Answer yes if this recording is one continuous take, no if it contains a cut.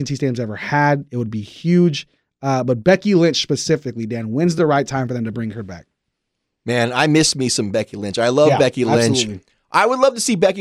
yes